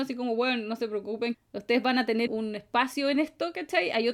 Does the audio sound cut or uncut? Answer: cut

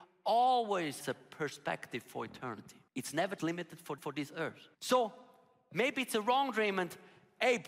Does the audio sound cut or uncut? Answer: cut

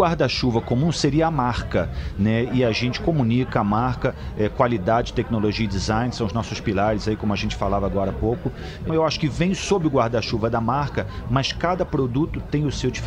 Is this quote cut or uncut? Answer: cut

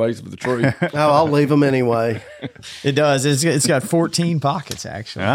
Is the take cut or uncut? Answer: uncut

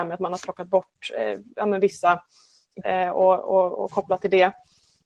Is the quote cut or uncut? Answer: cut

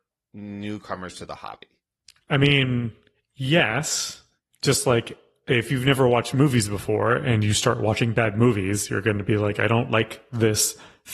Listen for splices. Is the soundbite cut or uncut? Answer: uncut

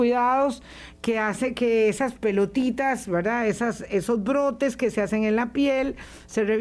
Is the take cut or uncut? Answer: uncut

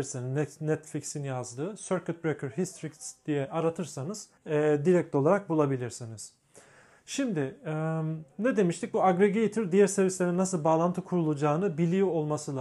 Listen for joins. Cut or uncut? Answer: cut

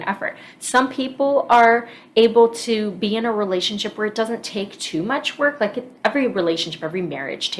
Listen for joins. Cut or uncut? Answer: uncut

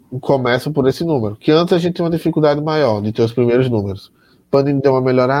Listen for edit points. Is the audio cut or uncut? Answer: uncut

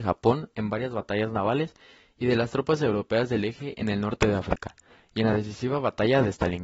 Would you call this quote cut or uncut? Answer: uncut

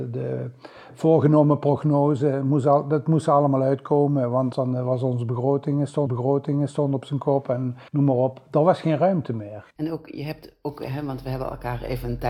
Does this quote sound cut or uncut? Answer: cut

